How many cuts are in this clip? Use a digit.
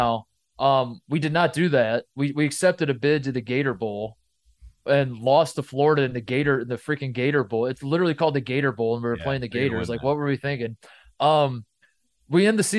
0